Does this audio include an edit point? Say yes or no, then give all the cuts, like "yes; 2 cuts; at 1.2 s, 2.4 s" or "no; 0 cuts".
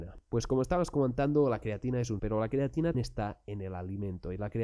yes; 2 cuts; at 2.2 s, 2.9 s